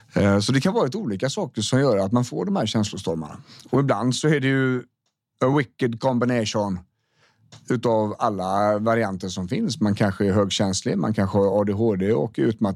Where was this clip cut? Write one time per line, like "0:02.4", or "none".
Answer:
none